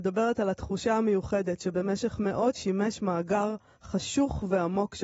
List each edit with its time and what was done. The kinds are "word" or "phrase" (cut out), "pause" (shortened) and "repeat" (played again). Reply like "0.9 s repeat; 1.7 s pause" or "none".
2.5 s phrase